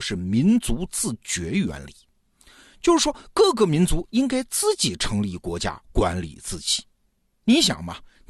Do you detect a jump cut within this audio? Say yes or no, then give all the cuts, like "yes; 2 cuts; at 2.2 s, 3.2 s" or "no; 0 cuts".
no; 0 cuts